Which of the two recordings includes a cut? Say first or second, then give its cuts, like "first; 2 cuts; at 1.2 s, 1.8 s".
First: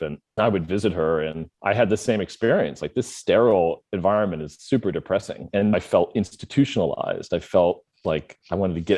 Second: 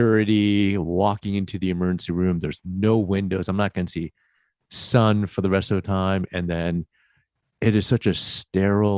first; 1 cut; at 1.5 s